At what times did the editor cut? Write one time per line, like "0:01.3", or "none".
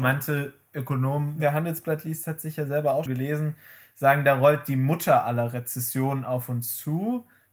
0:03.1